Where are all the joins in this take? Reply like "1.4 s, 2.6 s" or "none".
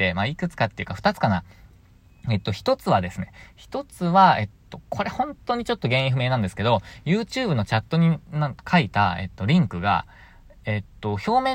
none